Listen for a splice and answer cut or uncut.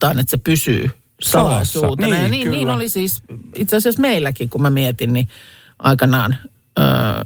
uncut